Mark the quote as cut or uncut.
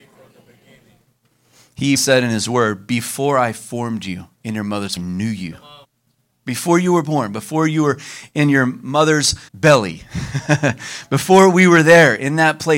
cut